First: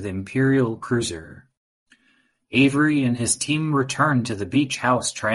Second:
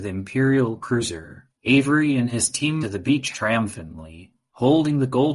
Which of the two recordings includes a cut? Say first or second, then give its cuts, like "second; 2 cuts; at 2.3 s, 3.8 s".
second; 3 cuts; at 1.6 s, 2.8 s, 3.3 s